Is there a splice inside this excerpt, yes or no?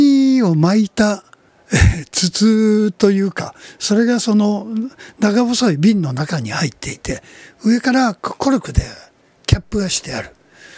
yes